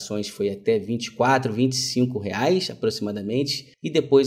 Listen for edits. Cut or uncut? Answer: uncut